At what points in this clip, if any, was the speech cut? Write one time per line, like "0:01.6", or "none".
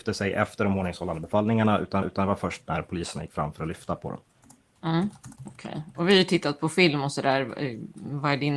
0:02.0
0:05.4